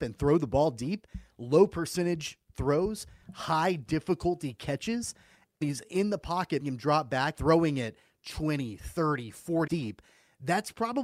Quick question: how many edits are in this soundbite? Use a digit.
4